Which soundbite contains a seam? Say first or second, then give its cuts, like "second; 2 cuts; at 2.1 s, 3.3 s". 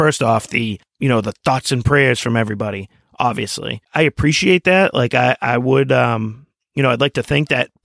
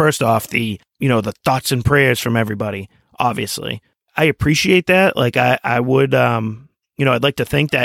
first; 1 cut; at 3.8 s